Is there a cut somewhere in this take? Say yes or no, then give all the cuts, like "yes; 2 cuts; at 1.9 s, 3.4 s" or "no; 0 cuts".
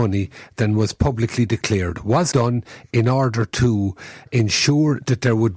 yes; 1 cut; at 2.3 s